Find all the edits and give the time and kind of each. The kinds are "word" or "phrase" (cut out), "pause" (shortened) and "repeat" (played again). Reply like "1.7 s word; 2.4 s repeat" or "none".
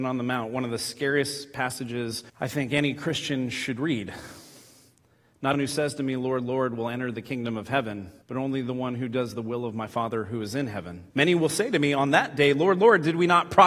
2.3 s pause; 5.5 s word; 8.2 s pause; 11.1 s pause